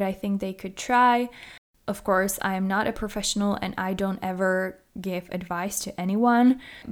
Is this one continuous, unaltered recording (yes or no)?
yes